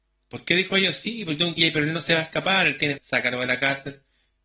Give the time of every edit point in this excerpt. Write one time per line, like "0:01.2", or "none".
0:01.6
0:03.0